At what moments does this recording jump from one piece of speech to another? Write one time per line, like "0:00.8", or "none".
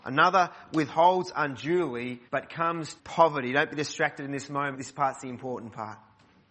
0:02.3
0:03.0
0:04.7